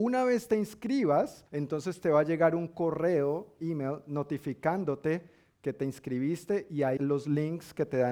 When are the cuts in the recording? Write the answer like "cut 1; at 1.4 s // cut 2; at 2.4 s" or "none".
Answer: cut 1; at 1.5 s // cut 2; at 3.6 s // cut 3; at 7.0 s